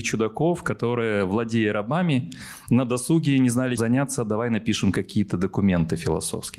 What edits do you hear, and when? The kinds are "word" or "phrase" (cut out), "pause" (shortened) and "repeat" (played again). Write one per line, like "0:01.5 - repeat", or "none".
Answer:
0:03.8 - word